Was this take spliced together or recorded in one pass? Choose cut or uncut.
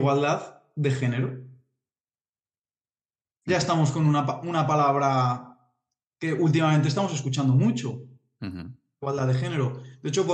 uncut